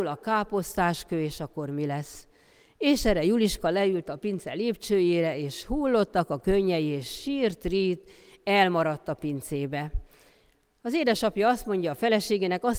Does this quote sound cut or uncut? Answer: uncut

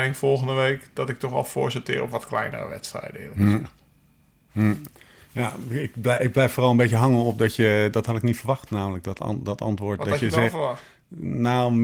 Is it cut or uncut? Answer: uncut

